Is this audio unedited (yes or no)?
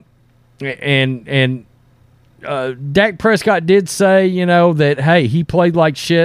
yes